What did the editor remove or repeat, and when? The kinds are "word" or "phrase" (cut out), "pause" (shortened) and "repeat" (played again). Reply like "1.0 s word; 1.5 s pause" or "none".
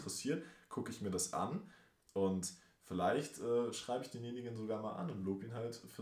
none